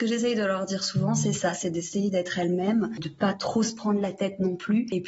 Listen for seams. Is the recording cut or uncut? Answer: cut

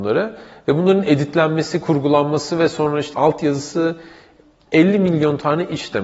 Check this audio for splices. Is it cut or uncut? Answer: cut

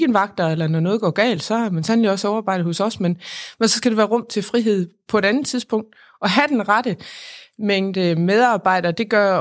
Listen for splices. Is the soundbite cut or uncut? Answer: uncut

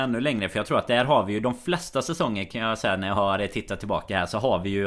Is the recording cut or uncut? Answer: uncut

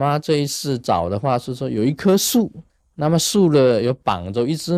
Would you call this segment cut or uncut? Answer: cut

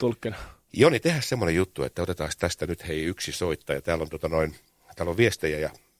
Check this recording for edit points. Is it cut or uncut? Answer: uncut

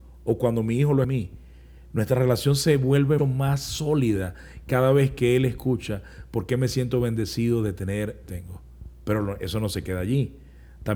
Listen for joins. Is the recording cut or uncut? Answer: cut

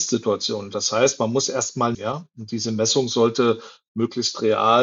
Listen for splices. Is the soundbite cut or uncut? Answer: cut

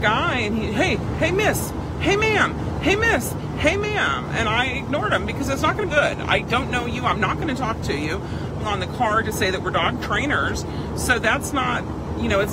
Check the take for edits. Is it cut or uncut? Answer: cut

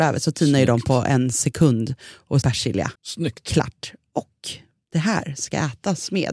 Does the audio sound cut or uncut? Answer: cut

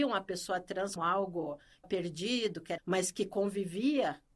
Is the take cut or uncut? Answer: cut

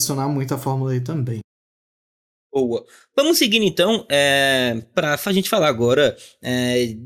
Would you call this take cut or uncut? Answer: uncut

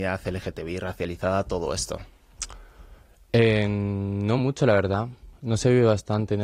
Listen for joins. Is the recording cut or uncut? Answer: uncut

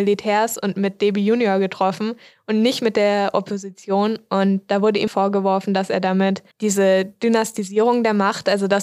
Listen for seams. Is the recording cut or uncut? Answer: cut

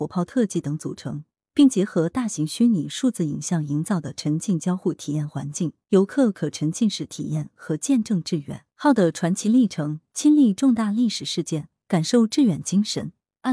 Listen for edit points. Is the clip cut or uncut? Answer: cut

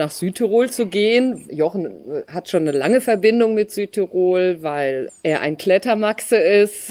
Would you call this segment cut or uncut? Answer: uncut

